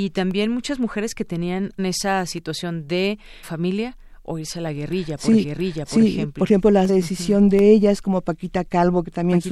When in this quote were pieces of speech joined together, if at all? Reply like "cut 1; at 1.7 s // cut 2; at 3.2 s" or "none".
cut 1; at 1.8 s // cut 2; at 3.4 s // cut 3; at 5.4 s // cut 4; at 6.9 s